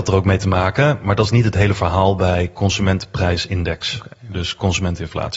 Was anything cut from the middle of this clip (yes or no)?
no